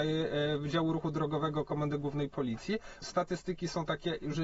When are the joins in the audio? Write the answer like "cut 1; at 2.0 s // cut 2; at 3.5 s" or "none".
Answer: cut 1; at 3.0 s